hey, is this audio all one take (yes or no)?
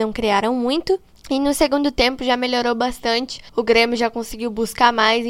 no